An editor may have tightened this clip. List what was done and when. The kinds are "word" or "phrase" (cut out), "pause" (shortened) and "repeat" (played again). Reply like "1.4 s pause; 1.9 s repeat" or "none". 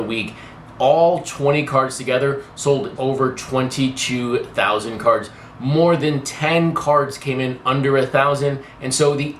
3.0 s word